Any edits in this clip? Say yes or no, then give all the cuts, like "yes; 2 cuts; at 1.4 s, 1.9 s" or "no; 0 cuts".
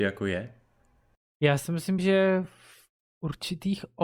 no; 0 cuts